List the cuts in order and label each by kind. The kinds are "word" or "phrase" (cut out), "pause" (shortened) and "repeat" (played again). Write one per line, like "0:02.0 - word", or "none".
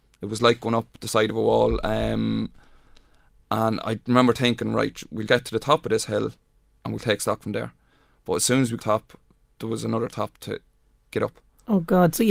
0:05.3 - word
0:08.8 - phrase